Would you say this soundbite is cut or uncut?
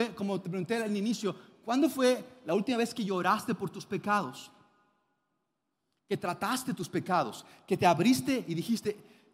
uncut